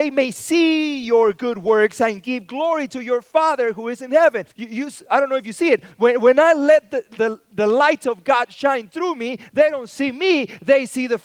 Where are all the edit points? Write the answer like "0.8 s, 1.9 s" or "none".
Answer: 4.5 s

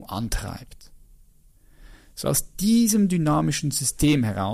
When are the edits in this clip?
none

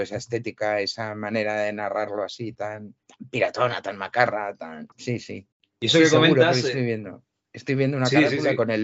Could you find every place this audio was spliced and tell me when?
3.0 s, 4.9 s, 5.5 s

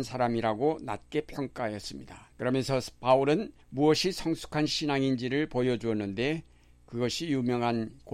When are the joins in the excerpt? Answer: 2.3 s, 3.6 s

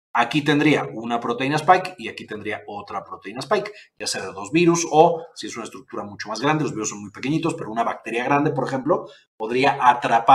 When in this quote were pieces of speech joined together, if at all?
none

